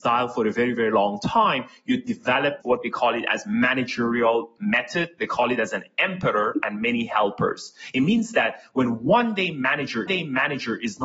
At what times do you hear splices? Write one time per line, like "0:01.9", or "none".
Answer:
0:02.6
0:10.1